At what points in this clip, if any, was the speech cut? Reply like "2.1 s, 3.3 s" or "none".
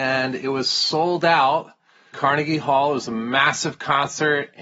2.1 s